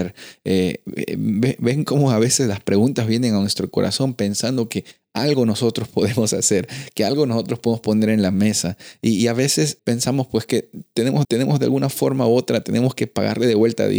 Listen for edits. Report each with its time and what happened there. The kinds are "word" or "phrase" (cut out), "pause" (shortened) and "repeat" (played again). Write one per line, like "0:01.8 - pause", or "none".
0:09.8 - word
0:11.2 - repeat